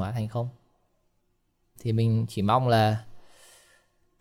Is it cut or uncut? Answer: cut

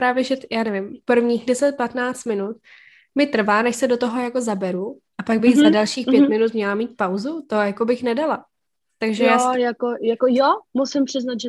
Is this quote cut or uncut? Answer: uncut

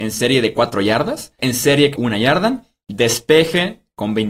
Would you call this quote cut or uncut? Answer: cut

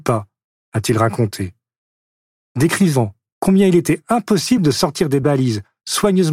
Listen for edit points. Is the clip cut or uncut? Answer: uncut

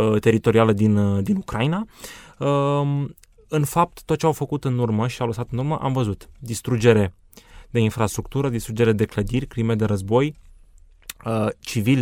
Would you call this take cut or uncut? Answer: uncut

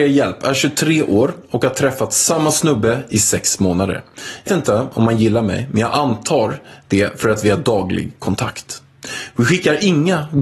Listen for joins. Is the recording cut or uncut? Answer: cut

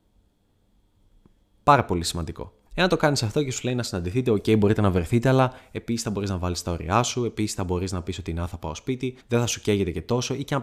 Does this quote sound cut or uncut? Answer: cut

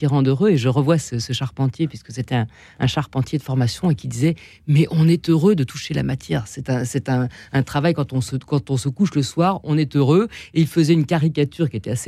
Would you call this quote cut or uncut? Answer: uncut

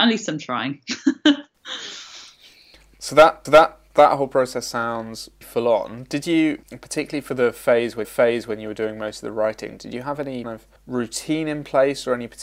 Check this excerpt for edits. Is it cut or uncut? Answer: cut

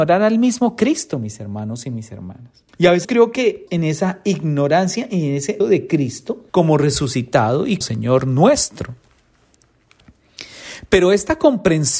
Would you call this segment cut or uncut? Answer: cut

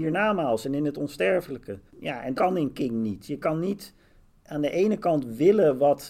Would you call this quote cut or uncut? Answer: cut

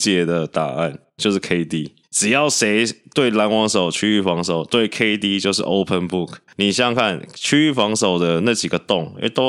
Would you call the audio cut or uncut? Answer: cut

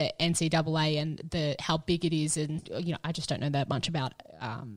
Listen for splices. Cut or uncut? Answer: uncut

